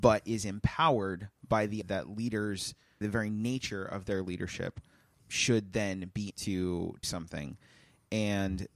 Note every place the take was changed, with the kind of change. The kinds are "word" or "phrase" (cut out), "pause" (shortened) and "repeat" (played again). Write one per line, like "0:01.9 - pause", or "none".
0:01.8 - word
0:03.0 - word
0:05.2 - word
0:06.3 - word
0:07.0 - word

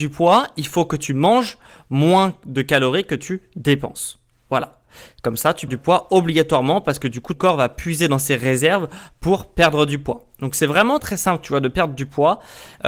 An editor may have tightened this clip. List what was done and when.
0:05.7 - word
0:07.3 - word
0:11.0 - word

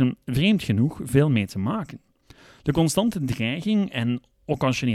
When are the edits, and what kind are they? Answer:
none

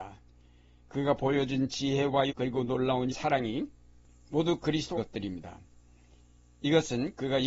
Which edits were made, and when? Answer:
0:02.3 - word
0:03.1 - word
0:05.0 - phrase

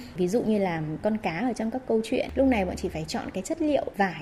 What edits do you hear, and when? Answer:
none

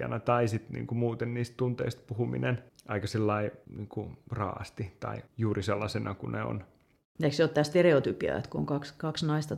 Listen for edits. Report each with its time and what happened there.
none

